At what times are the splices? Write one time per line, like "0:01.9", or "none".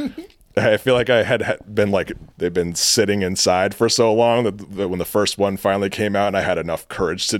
0:02.3